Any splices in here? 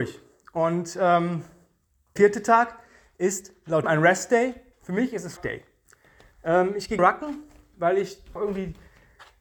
yes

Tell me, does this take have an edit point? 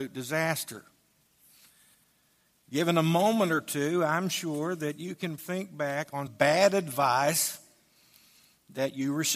yes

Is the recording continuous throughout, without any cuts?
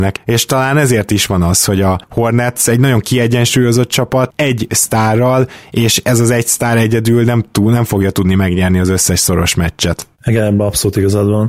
no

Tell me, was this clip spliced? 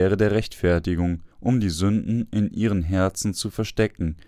yes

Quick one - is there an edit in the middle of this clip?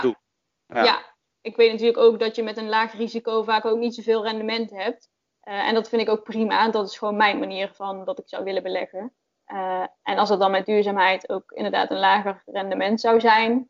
no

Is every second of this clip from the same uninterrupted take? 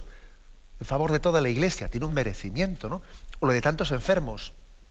no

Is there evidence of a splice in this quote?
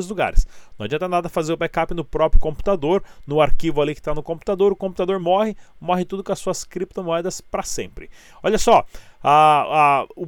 no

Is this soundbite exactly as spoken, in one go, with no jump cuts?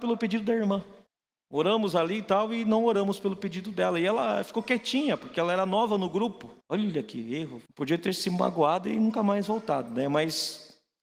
no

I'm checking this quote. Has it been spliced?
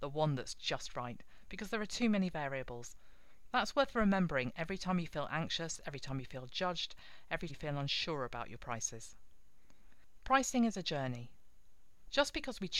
yes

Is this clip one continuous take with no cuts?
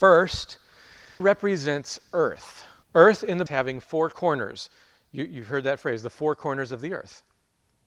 no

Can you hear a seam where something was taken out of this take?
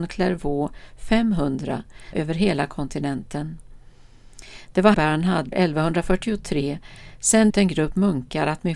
yes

